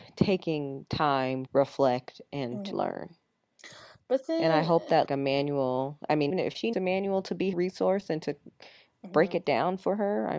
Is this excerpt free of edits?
no; 6 cuts; at 1.5 s, 2.7 s, 5.1 s, 6.3 s, 6.7 s, 7.5 s

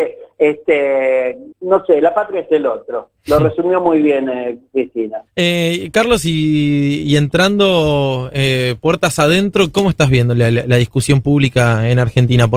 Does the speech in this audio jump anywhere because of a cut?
yes; 2 cuts; at 1.5 s, 5.3 s

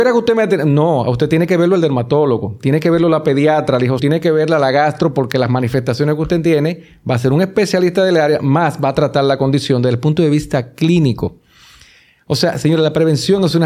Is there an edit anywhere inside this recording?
yes; 1 cut; at 4.0 s

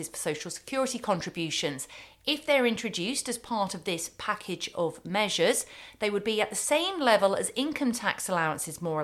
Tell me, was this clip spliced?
no; 0 cuts

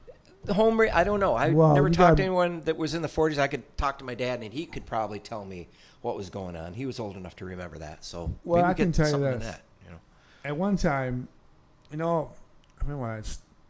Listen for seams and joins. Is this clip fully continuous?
yes; 0 cuts

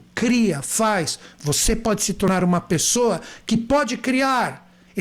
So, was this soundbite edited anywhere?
no; 0 cuts

